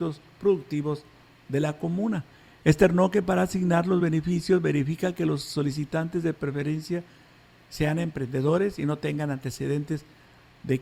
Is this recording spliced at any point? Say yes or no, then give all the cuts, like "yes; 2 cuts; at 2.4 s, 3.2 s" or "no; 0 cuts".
no; 0 cuts